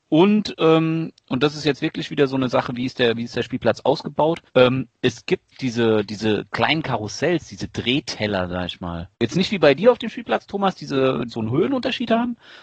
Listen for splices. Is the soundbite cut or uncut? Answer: cut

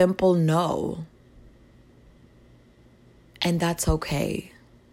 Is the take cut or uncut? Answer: uncut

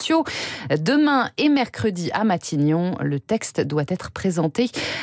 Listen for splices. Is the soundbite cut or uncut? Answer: uncut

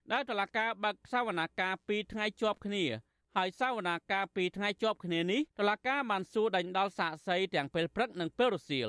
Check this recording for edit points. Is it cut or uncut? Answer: cut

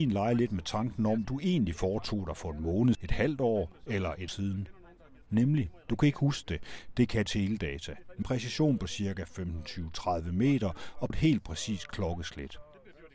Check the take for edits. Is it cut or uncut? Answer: cut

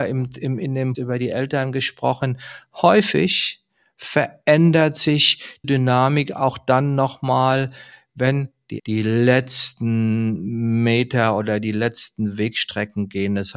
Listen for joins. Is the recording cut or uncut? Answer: cut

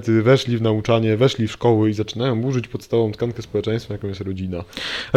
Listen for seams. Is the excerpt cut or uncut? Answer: uncut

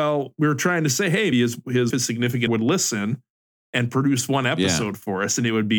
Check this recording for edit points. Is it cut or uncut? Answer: cut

